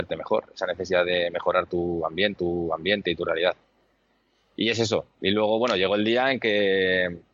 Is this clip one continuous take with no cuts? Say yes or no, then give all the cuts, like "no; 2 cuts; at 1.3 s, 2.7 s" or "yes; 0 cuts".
no; 1 cut; at 2.4 s